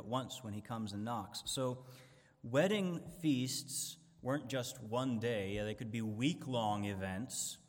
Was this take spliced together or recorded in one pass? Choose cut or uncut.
uncut